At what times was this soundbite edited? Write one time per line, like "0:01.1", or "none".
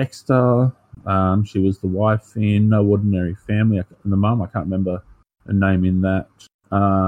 none